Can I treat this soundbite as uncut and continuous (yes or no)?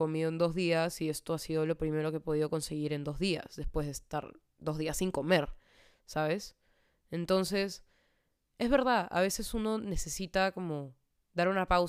yes